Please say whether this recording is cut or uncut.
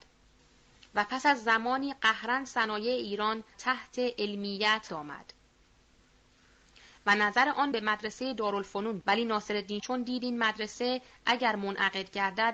cut